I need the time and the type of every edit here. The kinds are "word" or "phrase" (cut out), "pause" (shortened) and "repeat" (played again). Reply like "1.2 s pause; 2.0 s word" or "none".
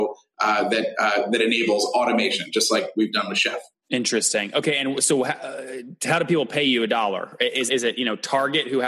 3.7 s pause; 7.7 s phrase